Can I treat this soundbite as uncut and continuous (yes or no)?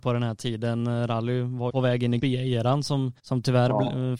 no